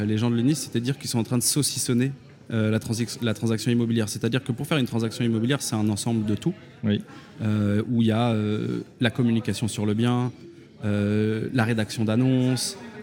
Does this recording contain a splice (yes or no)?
no